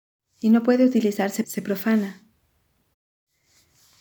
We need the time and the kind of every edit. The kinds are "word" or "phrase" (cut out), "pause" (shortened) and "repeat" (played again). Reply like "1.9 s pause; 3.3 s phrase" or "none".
1.4 s phrase